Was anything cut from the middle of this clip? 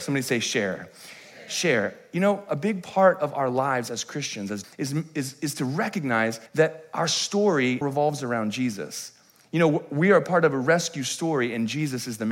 yes; 3 cuts; at 4.6 s, 6.5 s, 7.8 s

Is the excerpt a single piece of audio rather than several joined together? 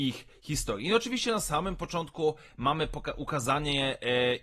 yes; 0 cuts

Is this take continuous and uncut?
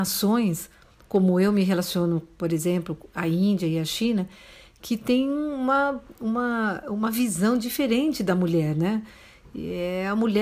yes; 0 cuts

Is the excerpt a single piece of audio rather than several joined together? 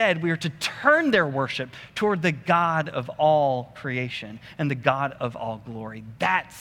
yes; 0 cuts

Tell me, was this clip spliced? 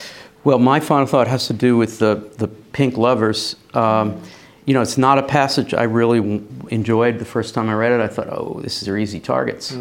yes; 1 cut; at 8.8 s

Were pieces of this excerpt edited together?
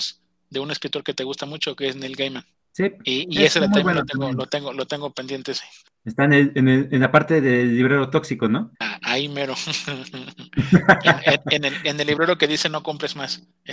yes; 3 cuts; at 2.5 s, 5.8 s, 8.7 s

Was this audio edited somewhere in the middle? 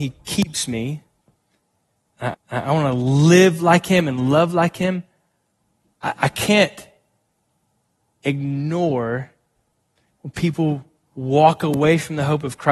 yes; 1 cut; at 2.3 s

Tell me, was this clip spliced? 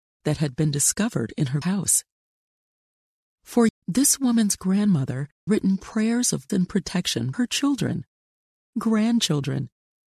yes; 5 cuts; at 1.6 s, 3.7 s, 5.5 s, 6.5 s, 7.3 s

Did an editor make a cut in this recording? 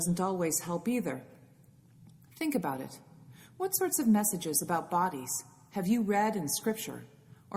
no; 0 cuts

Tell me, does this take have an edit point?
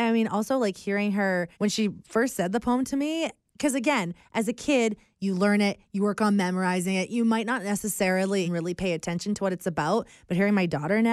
yes; 2 cuts; at 1.5 s, 8.4 s

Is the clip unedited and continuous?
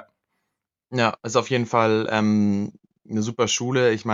yes; 0 cuts

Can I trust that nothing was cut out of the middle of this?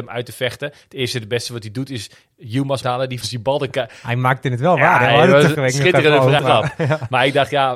no; 4 cuts; at 2.8 s, 3.2 s, 5.5 s, 6.4 s

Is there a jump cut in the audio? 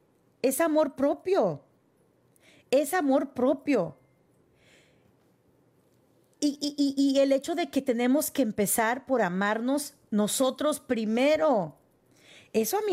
no; 0 cuts

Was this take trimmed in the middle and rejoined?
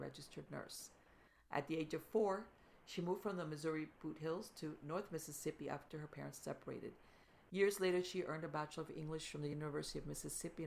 no; 0 cuts

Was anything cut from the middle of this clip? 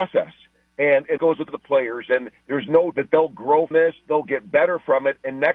yes; 4 cuts; at 1.2 s, 1.5 s, 2.9 s, 3.7 s

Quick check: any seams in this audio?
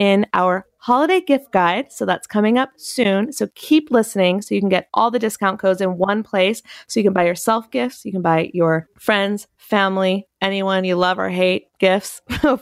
no; 0 cuts

